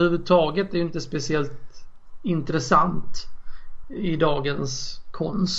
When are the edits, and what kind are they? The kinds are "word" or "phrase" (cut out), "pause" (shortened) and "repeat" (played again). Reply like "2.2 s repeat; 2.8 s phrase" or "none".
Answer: none